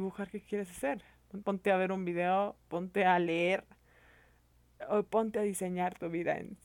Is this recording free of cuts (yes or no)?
no